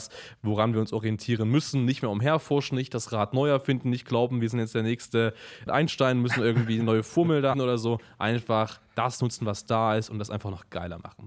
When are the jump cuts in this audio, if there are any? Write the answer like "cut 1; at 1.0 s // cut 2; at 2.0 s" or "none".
cut 1; at 5.7 s // cut 2; at 7.5 s